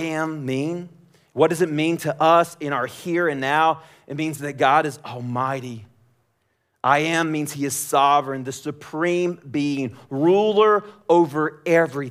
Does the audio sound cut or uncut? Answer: uncut